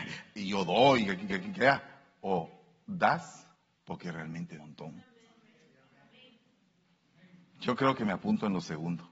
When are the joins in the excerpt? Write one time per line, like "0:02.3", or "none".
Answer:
0:01.3
0:03.5
0:04.6